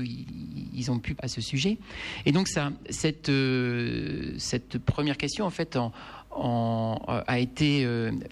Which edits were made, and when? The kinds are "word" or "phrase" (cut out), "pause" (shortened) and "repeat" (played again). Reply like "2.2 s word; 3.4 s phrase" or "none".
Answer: 1.2 s word